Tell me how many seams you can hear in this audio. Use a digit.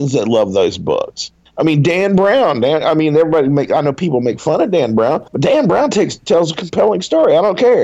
2